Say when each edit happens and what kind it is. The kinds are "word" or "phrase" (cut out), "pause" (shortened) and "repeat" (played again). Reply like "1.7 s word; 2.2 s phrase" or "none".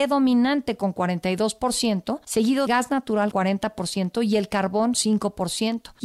2.7 s word; 3.3 s word; 4.9 s word